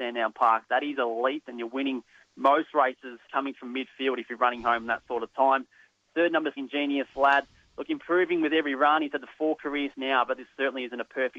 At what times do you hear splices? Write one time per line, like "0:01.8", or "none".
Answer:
0:03.3
0:06.6
0:09.9